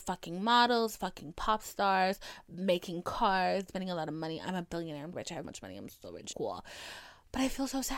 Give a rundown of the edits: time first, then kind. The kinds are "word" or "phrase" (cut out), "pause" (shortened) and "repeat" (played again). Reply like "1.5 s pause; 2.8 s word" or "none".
3.7 s phrase; 5.1 s word; 5.4 s word; 6.3 s phrase